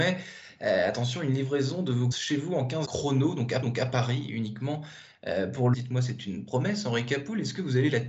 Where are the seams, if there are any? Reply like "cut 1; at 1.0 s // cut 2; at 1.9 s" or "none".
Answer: cut 1; at 2.1 s // cut 2; at 2.8 s // cut 3; at 3.6 s // cut 4; at 5.7 s